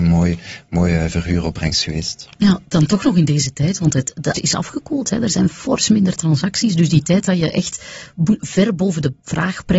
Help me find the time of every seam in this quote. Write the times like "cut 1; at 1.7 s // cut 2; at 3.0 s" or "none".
cut 1; at 4.3 s